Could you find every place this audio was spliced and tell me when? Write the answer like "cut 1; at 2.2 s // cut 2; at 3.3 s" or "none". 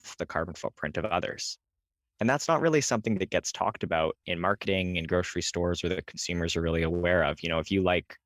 none